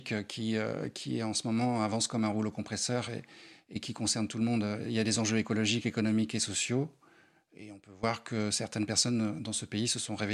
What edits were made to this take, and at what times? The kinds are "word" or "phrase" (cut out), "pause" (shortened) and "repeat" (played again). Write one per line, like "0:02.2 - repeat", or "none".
none